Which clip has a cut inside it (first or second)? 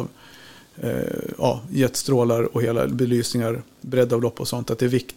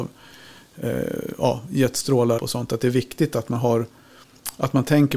second